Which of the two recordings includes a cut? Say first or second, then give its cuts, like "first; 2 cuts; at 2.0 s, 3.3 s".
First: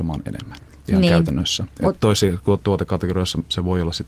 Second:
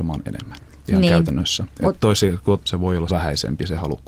second; 2 cuts; at 2.6 s, 3.1 s